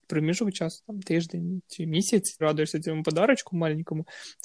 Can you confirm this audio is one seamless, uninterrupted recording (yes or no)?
no